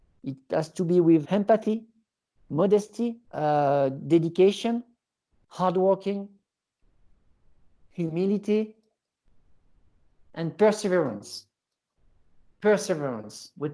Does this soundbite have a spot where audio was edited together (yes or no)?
yes